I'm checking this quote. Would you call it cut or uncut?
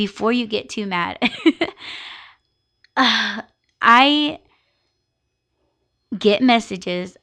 uncut